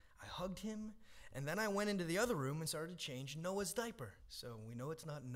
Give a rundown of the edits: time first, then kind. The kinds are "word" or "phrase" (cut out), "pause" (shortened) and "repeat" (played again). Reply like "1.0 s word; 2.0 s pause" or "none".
4.2 s pause